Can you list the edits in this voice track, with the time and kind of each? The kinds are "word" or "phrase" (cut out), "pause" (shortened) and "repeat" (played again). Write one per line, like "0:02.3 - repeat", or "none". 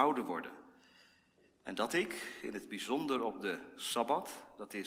none